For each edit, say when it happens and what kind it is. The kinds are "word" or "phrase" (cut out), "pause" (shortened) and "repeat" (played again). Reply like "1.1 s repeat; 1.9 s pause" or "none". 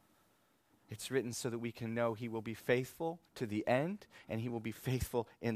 none